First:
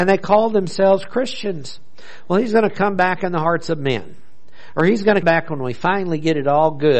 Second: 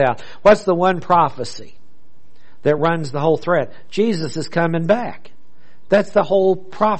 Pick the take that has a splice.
first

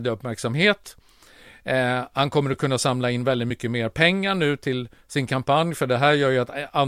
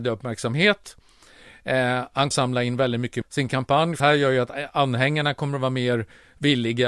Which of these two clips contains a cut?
second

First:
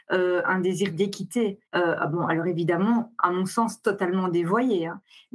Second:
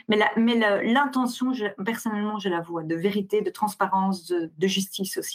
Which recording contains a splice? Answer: first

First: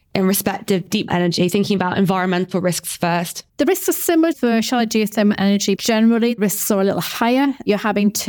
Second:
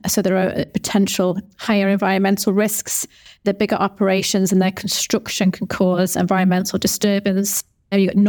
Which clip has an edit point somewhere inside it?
first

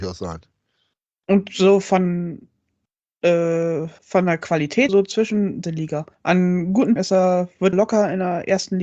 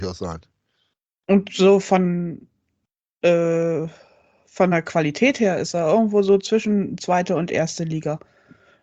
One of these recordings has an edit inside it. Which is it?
first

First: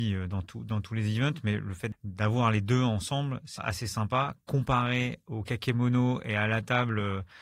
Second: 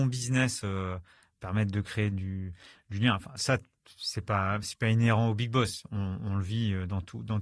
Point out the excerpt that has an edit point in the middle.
first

